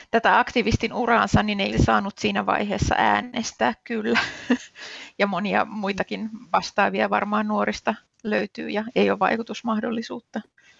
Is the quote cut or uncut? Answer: cut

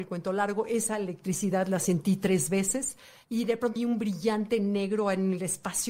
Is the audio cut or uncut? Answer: cut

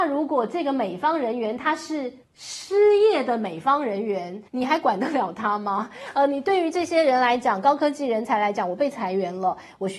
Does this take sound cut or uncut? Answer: cut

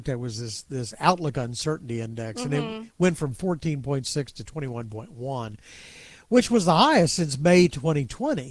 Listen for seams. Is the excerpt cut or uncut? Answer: uncut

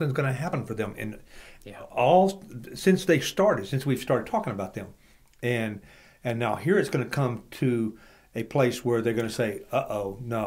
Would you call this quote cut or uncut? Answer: uncut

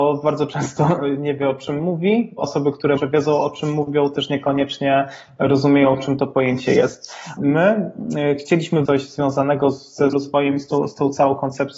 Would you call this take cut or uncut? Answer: cut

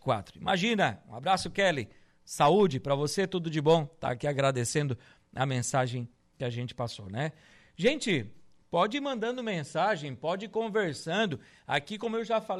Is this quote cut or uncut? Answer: uncut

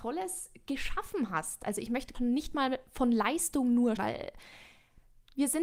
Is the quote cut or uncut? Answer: cut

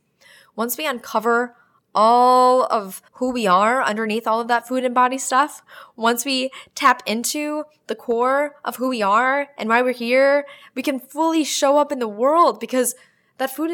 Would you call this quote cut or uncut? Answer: cut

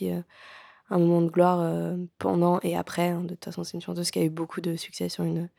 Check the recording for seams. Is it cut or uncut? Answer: uncut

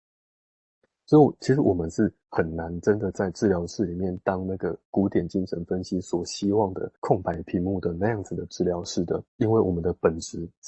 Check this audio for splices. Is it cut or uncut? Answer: cut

